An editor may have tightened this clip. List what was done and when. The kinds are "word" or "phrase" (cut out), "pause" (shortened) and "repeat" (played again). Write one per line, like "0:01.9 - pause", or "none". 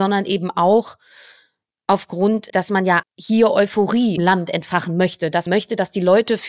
0:02.5 - word
0:03.0 - word
0:04.2 - word
0:05.5 - word